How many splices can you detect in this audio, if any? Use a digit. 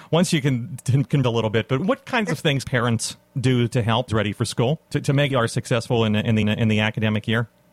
7